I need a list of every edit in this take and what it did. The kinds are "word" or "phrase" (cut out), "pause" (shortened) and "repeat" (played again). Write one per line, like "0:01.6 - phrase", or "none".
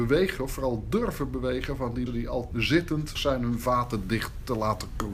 0:02.1 - word
0:02.5 - word
0:03.1 - word